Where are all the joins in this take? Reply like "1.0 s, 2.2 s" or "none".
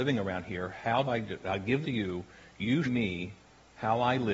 1.0 s, 1.8 s, 2.8 s